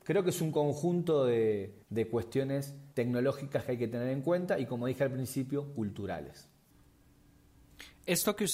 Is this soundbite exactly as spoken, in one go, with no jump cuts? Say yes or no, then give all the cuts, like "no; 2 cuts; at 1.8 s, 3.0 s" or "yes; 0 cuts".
no; 2 cuts; at 1.8 s, 2.9 s